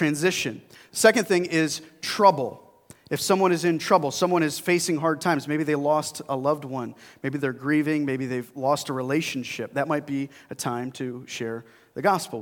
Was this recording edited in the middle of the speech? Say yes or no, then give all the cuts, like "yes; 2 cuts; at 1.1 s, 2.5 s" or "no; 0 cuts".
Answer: no; 0 cuts